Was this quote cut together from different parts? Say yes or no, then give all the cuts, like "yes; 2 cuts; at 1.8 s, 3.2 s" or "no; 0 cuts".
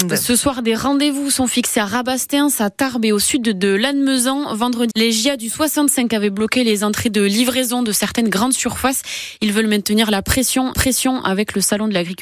yes; 2 cuts; at 4.9 s, 10.7 s